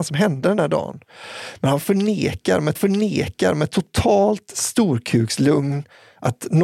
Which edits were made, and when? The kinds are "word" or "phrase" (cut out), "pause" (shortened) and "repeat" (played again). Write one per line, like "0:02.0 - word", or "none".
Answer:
0:02.8 - repeat